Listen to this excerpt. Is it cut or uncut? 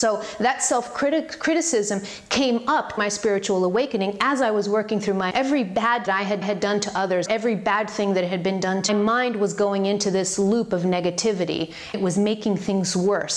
cut